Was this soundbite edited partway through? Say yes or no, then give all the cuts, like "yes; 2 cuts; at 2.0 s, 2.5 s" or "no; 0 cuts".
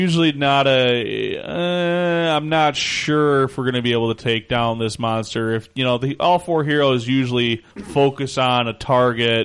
yes; 1 cut; at 7.7 s